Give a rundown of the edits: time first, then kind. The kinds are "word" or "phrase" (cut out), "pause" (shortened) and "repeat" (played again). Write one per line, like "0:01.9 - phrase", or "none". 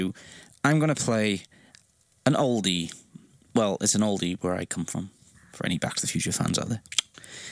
none